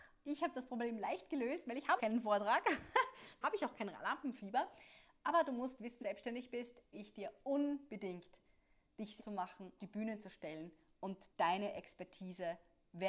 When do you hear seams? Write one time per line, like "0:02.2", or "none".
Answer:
0:02.0
0:03.4
0:06.0
0:06.9
0:09.2
0:09.8
0:11.3